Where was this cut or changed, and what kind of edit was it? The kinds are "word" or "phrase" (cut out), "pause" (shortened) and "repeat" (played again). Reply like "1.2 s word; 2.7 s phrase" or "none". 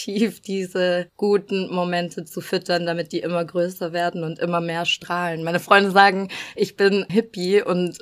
1.1 s pause; 7.1 s word